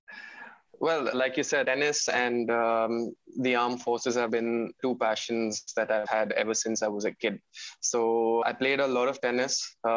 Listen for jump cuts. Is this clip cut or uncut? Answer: cut